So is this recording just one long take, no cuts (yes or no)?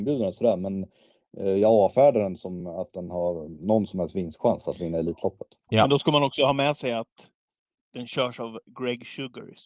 yes